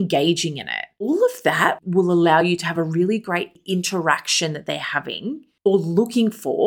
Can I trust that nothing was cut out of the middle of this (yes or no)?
yes